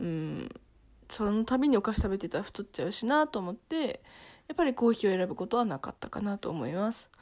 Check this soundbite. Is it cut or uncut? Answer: cut